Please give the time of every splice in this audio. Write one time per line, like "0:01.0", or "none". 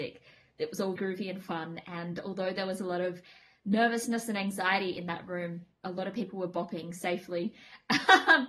0:01.0